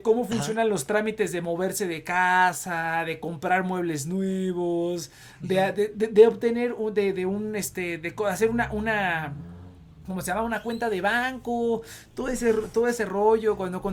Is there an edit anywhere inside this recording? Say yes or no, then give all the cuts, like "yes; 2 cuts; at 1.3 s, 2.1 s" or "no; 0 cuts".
no; 0 cuts